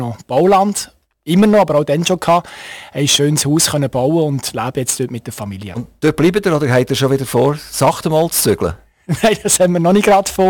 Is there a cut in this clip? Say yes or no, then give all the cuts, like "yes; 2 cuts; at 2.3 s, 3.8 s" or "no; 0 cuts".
no; 0 cuts